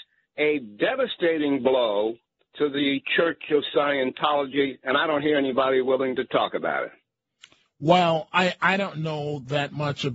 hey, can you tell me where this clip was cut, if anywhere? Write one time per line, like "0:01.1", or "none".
none